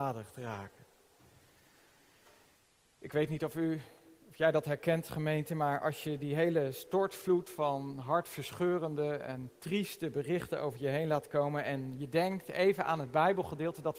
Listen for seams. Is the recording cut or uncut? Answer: uncut